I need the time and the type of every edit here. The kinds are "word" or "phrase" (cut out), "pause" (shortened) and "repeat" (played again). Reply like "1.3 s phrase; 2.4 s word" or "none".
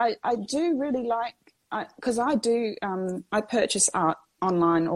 none